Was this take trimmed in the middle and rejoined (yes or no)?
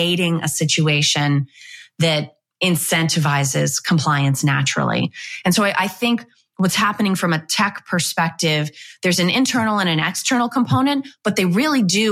no